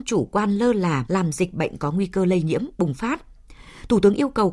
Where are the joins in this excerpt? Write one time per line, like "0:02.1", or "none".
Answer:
0:01.1